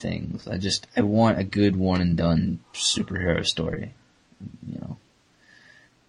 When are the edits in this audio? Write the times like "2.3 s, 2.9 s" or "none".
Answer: 2.6 s